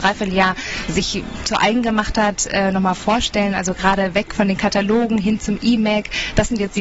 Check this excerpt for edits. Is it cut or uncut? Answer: uncut